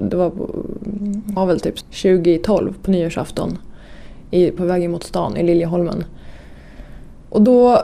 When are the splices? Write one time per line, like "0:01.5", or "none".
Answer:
0:01.4
0:01.8
0:04.6